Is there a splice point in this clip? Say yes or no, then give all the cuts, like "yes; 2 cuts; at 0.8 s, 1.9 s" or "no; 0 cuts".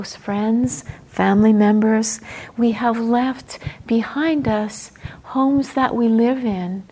no; 0 cuts